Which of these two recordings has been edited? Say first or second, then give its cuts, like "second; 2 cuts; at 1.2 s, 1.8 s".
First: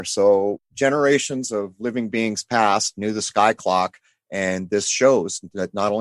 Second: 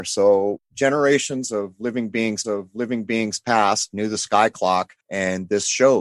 second; 2 cuts; at 2.4 s, 5.0 s